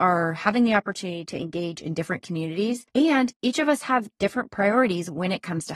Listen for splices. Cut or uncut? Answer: cut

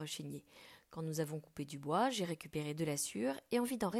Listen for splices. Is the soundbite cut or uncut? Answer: uncut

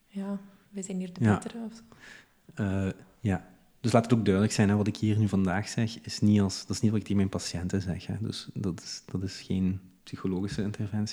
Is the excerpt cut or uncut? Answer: uncut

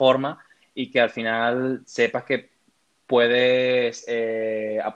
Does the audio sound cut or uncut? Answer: uncut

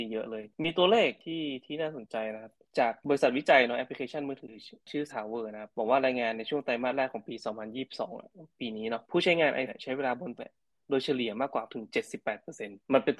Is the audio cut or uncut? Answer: cut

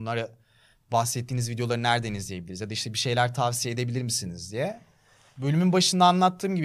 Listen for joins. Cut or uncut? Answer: uncut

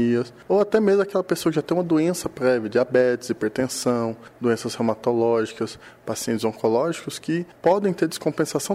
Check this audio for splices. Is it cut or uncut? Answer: uncut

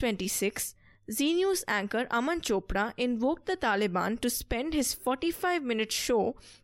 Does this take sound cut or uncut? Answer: uncut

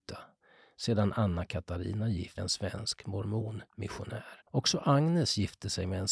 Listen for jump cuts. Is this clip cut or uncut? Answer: cut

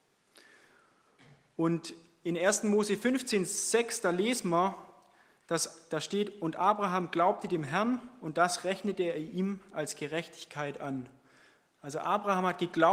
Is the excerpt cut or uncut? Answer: uncut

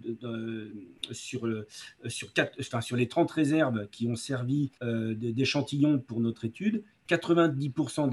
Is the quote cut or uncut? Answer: cut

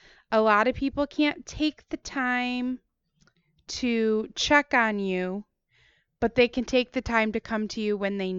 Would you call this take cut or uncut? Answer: uncut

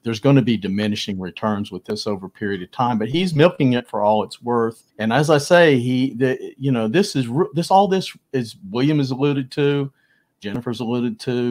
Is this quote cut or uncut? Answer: cut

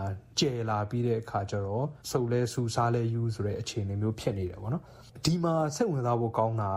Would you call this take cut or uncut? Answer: cut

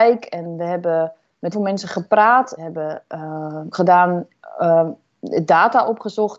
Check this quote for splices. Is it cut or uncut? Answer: cut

